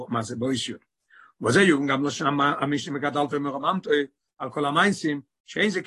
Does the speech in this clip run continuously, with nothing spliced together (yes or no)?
yes